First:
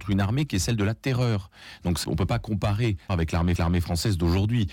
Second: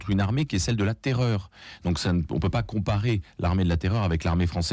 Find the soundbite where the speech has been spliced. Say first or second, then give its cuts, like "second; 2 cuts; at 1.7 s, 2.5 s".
first; 3 cuts; at 2.0 s, 3.1 s, 3.6 s